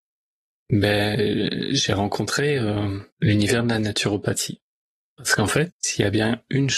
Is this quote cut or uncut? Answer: cut